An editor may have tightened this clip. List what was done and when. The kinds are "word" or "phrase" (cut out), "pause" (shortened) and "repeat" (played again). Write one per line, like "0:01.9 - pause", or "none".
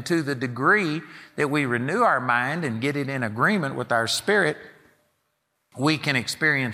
none